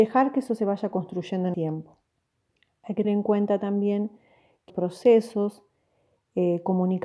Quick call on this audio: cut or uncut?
cut